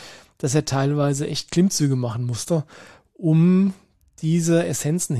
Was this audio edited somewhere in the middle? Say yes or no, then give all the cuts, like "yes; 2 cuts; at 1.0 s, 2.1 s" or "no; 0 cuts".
no; 0 cuts